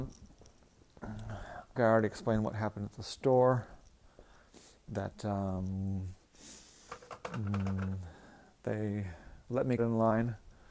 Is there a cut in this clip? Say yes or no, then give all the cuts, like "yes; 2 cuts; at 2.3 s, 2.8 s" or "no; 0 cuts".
yes; 2 cuts; at 1.7 s, 9.8 s